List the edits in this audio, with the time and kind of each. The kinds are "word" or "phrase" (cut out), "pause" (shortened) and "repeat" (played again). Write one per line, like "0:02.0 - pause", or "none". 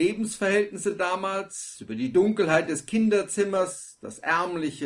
none